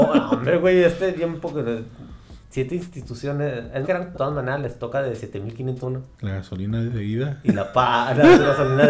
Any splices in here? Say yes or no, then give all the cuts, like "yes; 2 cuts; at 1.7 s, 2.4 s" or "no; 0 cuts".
yes; 6 cuts; at 2.4 s, 3.8 s, 4.1 s, 5.8 s, 6.1 s, 7.7 s